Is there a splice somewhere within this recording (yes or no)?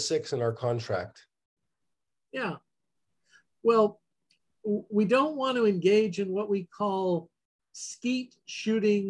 no